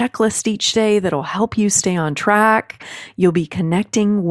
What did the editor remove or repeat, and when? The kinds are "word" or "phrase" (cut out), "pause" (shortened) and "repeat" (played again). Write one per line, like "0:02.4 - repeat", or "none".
none

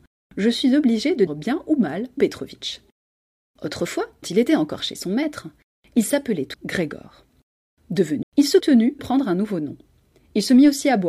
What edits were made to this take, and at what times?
0:01.3 - word
0:02.2 - word
0:04.2 - word
0:04.8 - word
0:06.5 - word
0:08.2 - word
0:08.6 - word
0:09.0 - word

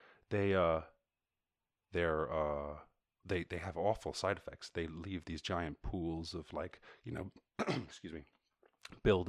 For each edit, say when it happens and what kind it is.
none

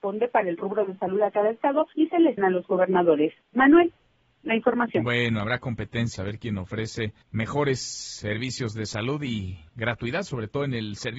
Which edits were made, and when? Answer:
0:01.9 - pause
0:02.4 - phrase
0:03.4 - pause
0:06.2 - word
0:07.2 - pause
0:09.7 - pause

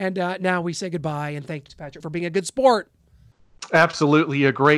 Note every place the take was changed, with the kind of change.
0:01.7 - word
0:02.0 - word

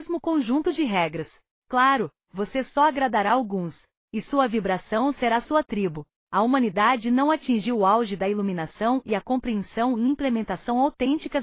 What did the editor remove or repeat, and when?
none

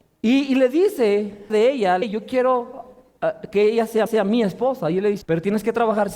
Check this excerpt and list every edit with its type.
0:01.5 - phrase
0:02.0 - word
0:04.1 - repeat
0:05.2 - word

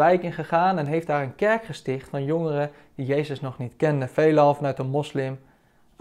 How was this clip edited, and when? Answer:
none

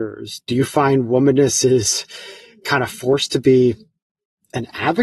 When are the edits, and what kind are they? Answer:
none

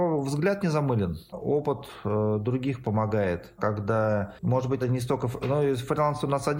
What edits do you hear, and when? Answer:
0:02.8 - word
0:03.6 - word
0:04.8 - word

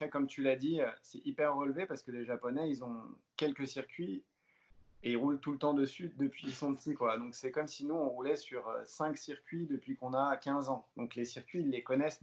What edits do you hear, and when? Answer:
0:10.9 - pause

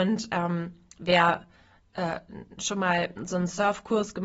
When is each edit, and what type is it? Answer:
none

